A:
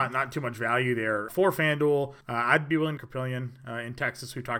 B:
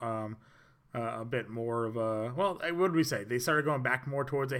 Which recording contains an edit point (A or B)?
A